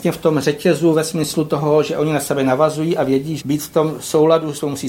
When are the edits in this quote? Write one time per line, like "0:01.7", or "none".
0:03.4